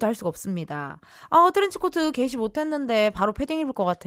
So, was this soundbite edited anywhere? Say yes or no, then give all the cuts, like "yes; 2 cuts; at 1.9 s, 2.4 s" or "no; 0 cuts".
no; 0 cuts